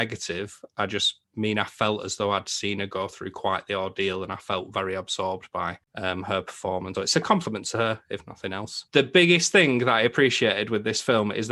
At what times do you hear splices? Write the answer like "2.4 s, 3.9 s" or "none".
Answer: 6.9 s, 8.9 s